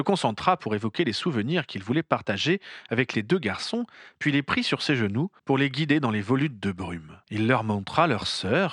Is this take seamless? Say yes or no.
no